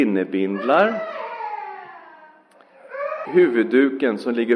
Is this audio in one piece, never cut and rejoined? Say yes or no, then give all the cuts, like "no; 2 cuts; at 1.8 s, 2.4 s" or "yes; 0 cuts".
no; 1 cut; at 3.3 s